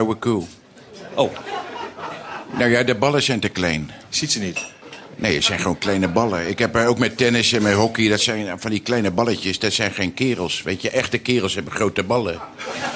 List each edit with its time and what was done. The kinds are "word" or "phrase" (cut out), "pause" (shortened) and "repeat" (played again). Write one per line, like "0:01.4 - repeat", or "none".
none